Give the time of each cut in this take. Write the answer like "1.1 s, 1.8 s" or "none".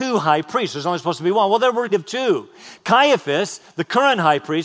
1.9 s